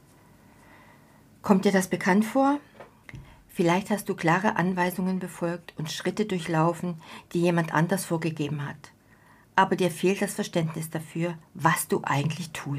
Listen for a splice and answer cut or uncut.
uncut